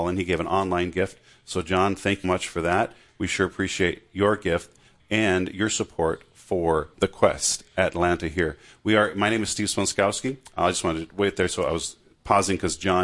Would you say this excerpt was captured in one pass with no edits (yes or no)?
no